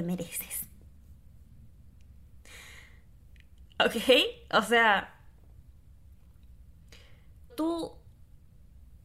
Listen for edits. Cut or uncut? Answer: cut